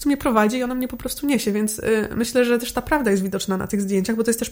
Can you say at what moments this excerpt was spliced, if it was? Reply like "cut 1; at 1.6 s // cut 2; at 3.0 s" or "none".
none